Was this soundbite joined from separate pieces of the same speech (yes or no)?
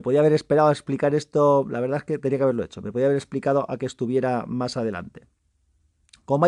no